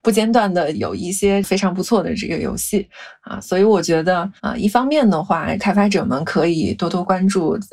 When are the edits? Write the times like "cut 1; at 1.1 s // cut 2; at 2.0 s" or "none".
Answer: cut 1; at 4.4 s